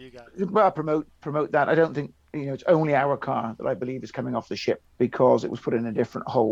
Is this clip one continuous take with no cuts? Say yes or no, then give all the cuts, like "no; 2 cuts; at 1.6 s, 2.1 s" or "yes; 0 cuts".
no; 2 cuts; at 1.2 s, 4.9 s